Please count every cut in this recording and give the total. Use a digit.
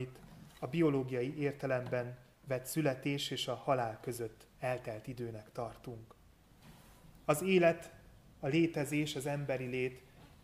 0